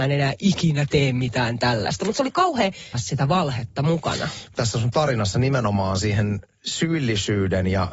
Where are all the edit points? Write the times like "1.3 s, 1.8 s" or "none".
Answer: 2.9 s, 4.5 s